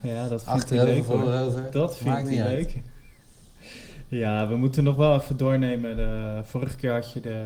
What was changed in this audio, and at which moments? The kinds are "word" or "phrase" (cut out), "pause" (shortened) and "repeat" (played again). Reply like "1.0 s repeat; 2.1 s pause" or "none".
none